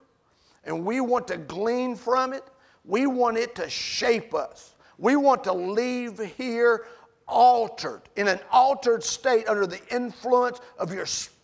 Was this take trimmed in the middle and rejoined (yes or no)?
no